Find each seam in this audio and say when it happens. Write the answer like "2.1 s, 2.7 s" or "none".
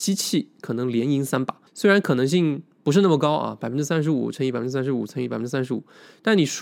1.7 s